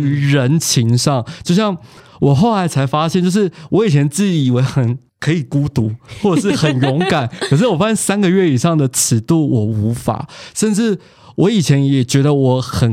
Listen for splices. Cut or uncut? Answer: uncut